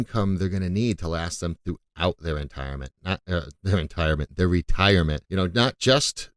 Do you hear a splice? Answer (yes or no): yes